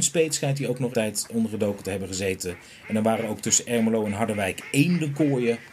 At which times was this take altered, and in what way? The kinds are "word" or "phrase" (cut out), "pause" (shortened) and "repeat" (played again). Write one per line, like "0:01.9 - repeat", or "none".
0:00.9 - word